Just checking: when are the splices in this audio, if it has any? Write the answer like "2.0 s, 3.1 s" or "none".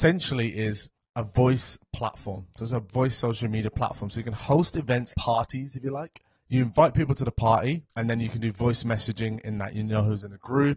1.0 s, 5.1 s, 6.4 s, 7.9 s